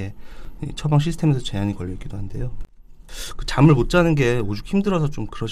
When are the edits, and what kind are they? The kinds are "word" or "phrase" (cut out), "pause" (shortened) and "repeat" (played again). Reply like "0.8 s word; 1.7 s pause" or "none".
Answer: none